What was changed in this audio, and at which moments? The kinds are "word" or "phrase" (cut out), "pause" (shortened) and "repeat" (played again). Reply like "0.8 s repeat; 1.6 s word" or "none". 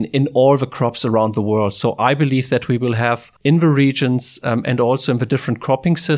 3.4 s pause